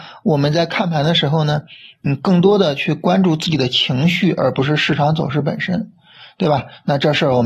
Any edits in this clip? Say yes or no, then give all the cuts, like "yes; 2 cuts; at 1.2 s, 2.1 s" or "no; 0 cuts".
no; 0 cuts